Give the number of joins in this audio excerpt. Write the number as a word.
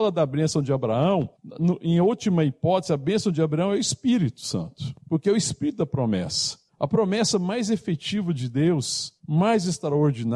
four